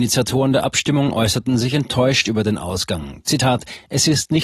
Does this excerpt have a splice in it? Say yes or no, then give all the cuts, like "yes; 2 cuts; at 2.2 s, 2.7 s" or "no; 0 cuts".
no; 0 cuts